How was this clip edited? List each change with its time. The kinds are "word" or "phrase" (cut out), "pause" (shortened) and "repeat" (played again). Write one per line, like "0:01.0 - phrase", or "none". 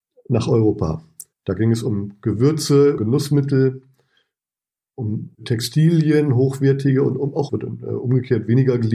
0:01.3 - pause
0:03.0 - word
0:05.3 - pause
0:07.5 - phrase

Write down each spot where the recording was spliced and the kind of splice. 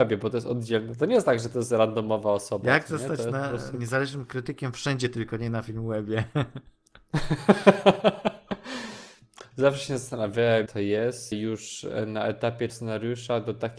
0:10.7 - word
0:11.3 - word
0:12.7 - word

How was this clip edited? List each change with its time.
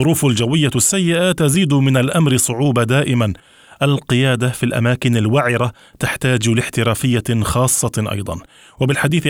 none

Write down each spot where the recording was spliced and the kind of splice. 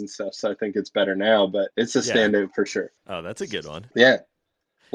0:01.7 - pause
0:03.0 - pause
0:03.9 - pause

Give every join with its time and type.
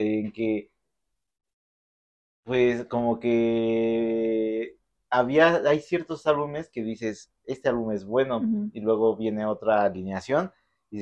none

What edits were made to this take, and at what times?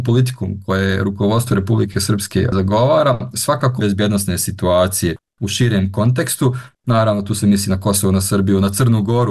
0:03.8 - phrase

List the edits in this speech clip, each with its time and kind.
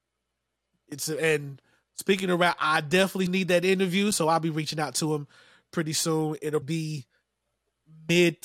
0:03.3 - word
0:06.6 - word

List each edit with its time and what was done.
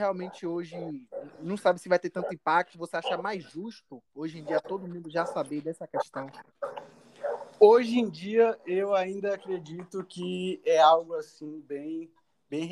0:04.1 - pause

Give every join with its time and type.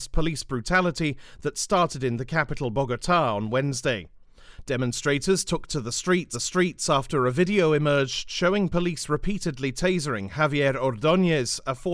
0:06.3 - repeat

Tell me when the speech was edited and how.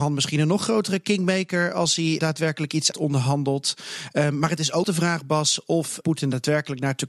0:02.2 - word
0:02.9 - word
0:04.8 - word
0:06.0 - word

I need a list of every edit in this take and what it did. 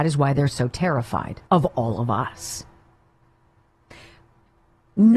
0:01.4 - pause

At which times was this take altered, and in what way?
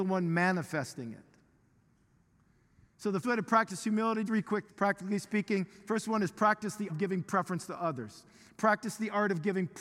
0:03.2 - word
0:04.3 - word
0:04.7 - word
0:06.9 - word

